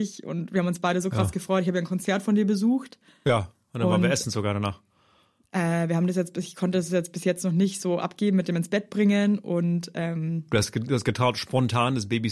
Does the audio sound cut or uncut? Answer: uncut